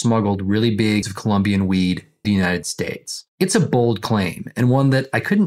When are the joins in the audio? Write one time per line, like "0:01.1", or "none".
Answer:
0:01.0
0:02.2
0:03.3